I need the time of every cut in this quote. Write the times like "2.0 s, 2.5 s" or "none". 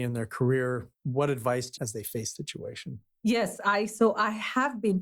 0.9 s, 1.8 s, 2.4 s